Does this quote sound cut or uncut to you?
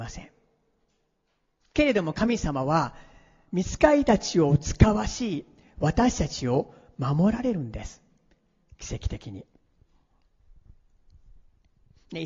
uncut